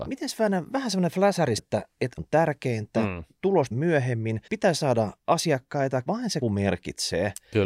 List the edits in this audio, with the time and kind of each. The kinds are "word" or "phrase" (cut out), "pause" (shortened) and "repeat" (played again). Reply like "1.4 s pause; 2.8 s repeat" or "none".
1.6 s word; 2.2 s phrase; 3.7 s word; 4.5 s pause; 6.1 s word; 6.4 s word